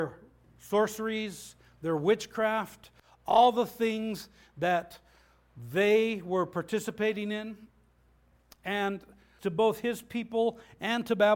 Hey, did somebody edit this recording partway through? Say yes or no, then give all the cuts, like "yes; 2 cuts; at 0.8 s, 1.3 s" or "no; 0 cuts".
yes; 1 cut; at 9.4 s